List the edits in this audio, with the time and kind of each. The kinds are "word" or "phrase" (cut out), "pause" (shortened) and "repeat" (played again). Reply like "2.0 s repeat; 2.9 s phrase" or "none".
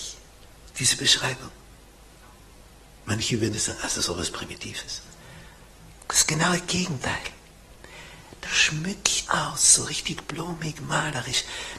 3.5 s word; 8.4 s word; 9.3 s word; 9.9 s word